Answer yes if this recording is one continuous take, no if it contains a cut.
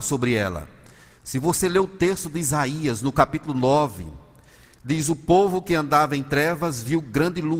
yes